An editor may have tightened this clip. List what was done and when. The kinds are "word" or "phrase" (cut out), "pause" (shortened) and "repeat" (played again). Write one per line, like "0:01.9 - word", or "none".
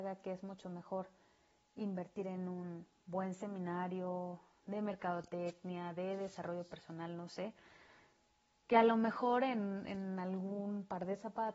none